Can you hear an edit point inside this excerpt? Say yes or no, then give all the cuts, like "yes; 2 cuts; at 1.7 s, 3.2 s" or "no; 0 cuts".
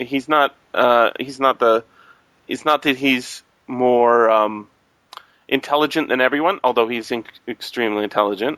no; 0 cuts